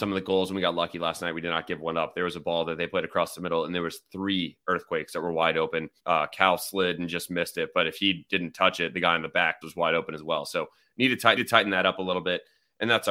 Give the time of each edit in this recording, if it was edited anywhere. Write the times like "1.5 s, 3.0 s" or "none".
6.0 s, 9.6 s, 11.4 s